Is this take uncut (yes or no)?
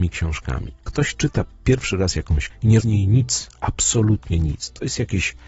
no